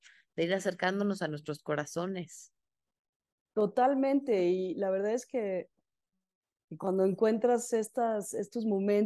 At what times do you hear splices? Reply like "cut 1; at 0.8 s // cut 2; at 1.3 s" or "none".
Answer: none